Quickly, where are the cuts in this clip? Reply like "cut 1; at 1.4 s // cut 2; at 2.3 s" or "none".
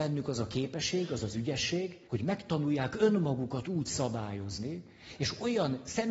cut 1; at 2.1 s